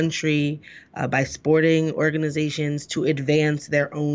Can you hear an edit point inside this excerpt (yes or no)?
no